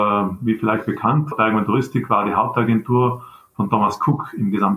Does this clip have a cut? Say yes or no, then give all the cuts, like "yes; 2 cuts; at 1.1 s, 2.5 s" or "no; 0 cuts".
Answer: yes; 1 cut; at 1.3 s